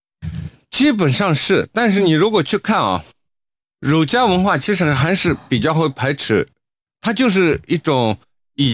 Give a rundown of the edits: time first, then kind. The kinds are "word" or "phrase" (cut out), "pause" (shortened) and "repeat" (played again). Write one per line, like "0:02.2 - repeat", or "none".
none